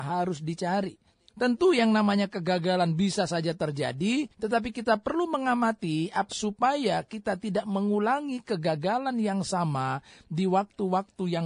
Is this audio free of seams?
no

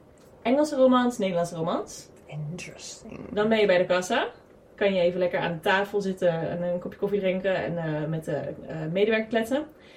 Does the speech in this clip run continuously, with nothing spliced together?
no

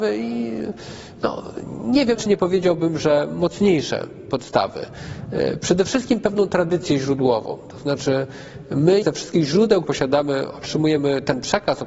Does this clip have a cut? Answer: yes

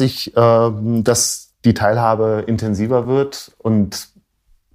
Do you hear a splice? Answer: no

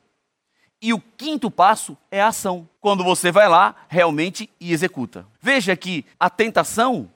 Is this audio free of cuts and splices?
no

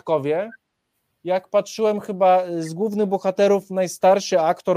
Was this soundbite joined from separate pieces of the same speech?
no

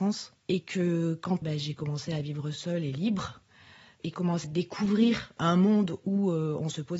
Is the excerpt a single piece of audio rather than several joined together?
no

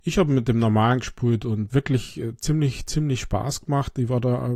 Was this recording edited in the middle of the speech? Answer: yes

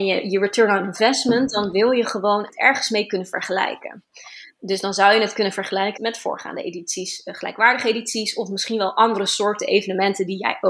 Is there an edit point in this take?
yes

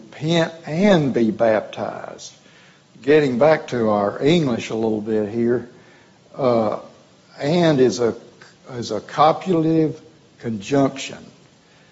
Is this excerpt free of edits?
yes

